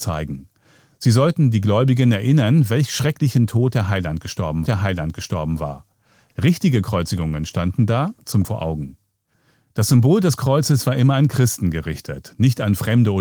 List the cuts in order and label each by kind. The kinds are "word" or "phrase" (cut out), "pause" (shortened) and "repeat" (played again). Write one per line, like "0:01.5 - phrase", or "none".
0:04.7 - repeat
0:08.4 - phrase